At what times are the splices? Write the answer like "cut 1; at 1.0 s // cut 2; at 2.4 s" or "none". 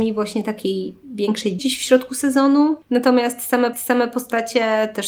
cut 1; at 1.6 s // cut 2; at 2.8 s // cut 3; at 3.7 s